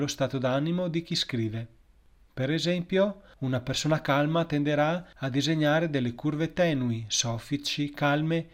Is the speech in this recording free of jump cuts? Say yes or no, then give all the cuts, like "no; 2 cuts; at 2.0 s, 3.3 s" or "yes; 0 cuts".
yes; 0 cuts